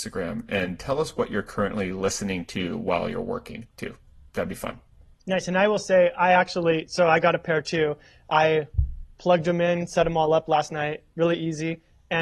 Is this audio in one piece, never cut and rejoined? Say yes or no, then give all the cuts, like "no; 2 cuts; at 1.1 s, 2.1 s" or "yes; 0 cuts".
yes; 0 cuts